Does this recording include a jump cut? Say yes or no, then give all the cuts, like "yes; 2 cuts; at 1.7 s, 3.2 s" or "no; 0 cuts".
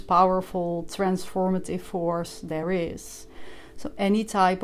no; 0 cuts